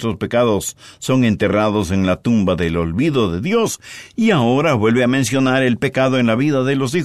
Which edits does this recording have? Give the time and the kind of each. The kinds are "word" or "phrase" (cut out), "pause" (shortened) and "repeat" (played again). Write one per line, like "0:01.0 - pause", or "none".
none